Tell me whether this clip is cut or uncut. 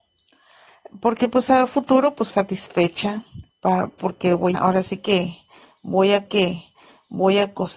cut